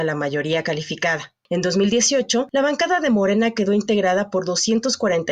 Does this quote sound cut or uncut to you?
uncut